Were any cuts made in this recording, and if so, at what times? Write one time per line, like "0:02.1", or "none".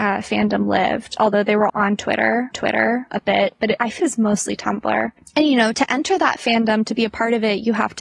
0:01.7
0:02.5
0:04.0